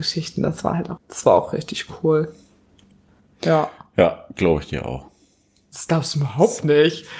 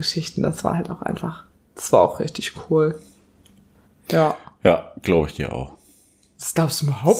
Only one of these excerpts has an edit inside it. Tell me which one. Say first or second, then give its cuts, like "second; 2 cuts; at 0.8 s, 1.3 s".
first; 1 cut; at 1.0 s